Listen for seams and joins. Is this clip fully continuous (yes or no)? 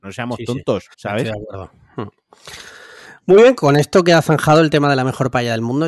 no